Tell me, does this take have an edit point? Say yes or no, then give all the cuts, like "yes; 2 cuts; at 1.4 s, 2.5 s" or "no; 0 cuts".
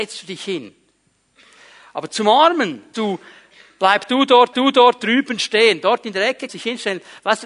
yes; 3 cuts; at 2.9 s, 4.5 s, 6.5 s